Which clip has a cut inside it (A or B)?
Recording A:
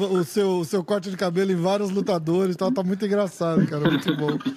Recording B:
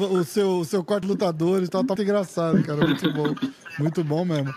B